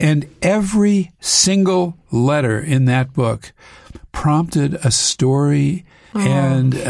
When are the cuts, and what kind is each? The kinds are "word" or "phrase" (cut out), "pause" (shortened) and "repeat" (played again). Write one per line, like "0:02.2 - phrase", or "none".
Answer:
none